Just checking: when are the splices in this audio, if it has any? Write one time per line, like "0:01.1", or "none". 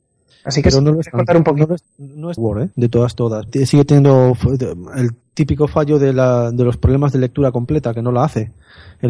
0:01.9
0:02.4
0:02.7
0:03.5